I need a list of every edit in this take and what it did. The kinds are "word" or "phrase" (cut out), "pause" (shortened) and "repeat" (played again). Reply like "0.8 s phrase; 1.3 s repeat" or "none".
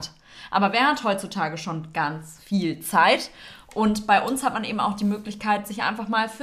none